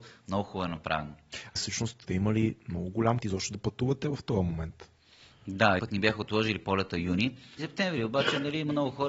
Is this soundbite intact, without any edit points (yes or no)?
no